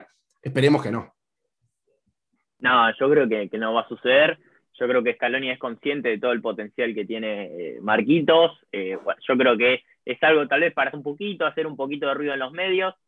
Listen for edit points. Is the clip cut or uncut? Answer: cut